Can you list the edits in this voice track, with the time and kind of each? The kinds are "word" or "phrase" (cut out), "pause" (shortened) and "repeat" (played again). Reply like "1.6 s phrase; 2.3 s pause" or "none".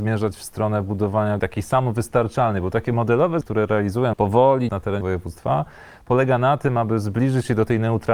1.4 s phrase; 3.4 s word; 4.1 s word; 4.7 s phrase; 5.0 s word